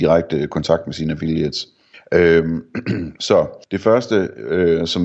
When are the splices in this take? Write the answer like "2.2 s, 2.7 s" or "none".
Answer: 1.9 s, 3.6 s